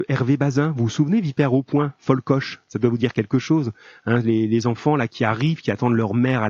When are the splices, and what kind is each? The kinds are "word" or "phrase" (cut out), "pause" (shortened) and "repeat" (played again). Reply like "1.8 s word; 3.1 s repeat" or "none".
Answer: none